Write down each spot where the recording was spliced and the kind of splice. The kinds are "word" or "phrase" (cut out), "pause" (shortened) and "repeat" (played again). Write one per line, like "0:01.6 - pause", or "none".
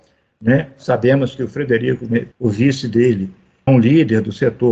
0:02.3 - word
0:03.7 - word